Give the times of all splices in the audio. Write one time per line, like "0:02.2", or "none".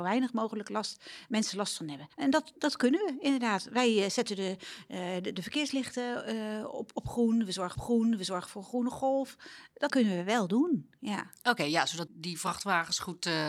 0:02.1
0:07.7
0:09.9
0:12.1

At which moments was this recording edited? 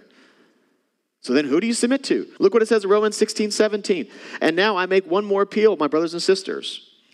0:02.4

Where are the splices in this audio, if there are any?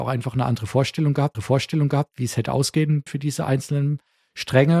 0:01.3
0:03.1

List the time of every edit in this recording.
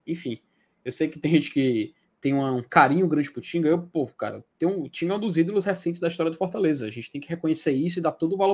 none

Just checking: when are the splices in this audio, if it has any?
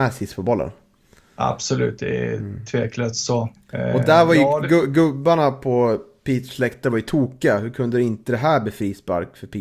0:03.5

